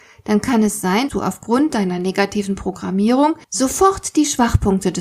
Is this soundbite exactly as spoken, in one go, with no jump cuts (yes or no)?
no